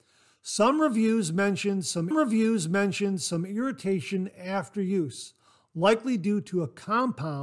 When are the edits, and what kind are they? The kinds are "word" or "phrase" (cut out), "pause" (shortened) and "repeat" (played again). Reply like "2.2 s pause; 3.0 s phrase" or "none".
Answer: 2.1 s repeat